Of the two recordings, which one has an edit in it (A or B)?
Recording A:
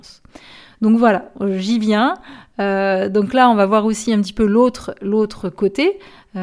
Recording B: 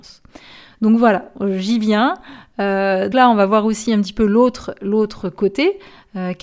B